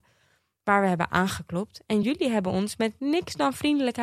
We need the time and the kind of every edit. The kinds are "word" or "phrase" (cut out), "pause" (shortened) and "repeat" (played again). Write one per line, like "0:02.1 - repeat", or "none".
none